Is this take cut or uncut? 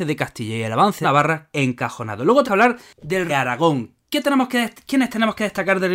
cut